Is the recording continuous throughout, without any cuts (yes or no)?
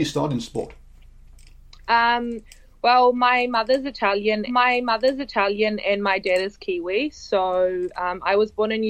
no